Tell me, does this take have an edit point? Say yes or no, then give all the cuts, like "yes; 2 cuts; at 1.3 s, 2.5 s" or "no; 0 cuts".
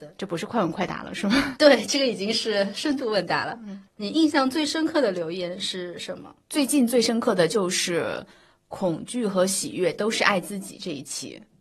yes; 2 cuts; at 3.9 s, 6.4 s